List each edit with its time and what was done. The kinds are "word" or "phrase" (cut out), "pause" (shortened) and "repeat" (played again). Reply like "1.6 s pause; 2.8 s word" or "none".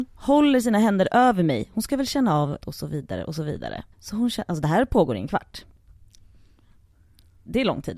2.6 s word; 3.9 s pause